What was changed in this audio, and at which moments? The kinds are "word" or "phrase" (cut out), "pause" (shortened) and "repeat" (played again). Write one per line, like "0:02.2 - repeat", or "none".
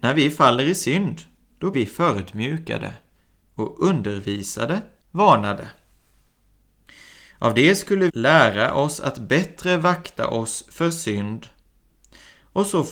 0:01.7 - word
0:05.0 - word
0:08.1 - word